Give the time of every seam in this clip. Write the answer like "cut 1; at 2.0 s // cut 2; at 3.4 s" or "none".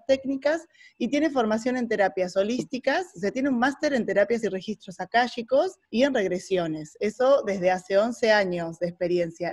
cut 1; at 4.4 s // cut 2; at 5.8 s